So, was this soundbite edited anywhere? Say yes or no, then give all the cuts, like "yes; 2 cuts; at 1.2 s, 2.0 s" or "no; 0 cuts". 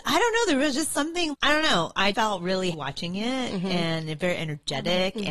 yes; 3 cuts; at 1.3 s, 2.1 s, 2.7 s